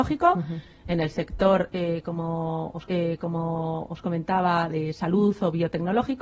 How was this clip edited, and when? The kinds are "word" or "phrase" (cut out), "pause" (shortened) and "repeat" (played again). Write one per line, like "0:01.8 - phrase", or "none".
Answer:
0:02.9 - repeat